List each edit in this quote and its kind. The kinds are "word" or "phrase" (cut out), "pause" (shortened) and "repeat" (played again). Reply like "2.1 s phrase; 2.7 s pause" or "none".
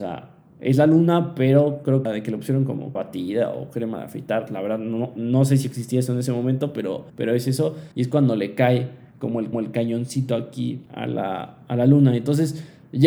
2.1 s phrase; 3.0 s word; 7.1 s pause; 7.9 s pause; 9.5 s repeat; 10.9 s pause